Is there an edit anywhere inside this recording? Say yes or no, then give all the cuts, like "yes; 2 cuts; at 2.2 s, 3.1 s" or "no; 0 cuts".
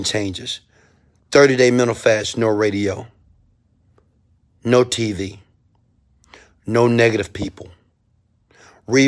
no; 0 cuts